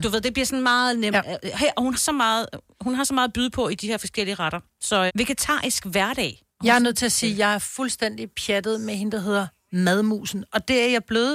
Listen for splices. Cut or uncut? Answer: cut